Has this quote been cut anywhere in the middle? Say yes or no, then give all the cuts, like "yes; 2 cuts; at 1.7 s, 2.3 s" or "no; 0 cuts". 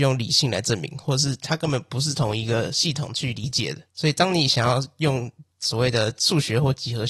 yes; 2 cuts; at 3.9 s, 5.5 s